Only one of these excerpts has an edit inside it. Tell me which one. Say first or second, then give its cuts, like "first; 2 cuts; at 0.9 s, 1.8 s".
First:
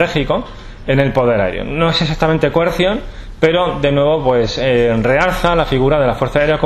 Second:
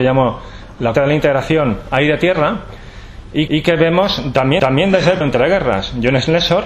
second; 4 cuts; at 0.9 s, 3.5 s, 4.6 s, 5.2 s